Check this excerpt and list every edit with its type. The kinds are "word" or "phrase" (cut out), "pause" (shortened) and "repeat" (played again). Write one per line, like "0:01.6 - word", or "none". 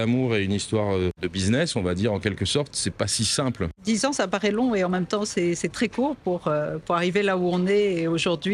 none